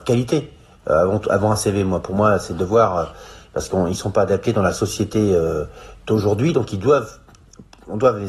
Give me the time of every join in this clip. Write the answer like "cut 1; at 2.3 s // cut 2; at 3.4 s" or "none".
none